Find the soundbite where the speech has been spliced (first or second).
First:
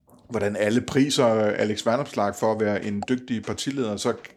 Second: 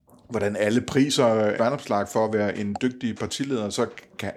second